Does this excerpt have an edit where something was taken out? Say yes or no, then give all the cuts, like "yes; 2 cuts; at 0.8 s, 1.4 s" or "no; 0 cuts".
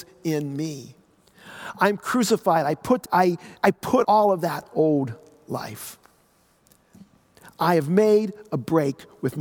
yes; 3 cuts; at 3.0 s, 3.6 s, 4.0 s